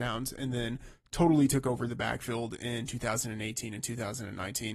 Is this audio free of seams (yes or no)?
yes